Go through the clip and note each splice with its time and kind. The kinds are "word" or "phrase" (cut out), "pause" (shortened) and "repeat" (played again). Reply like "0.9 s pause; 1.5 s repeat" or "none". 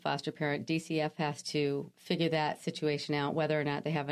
1.9 s pause